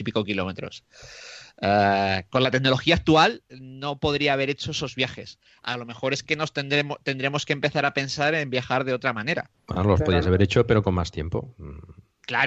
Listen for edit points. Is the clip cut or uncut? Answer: cut